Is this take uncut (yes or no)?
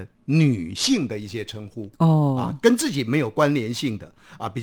no